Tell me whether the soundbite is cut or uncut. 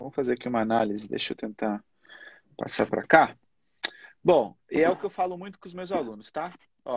uncut